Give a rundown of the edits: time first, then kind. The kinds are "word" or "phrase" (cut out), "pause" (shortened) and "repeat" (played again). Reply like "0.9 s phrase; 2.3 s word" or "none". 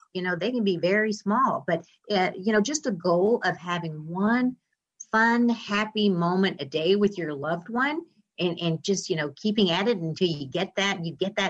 none